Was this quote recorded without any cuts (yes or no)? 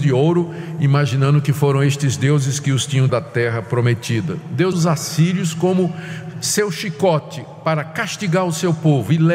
no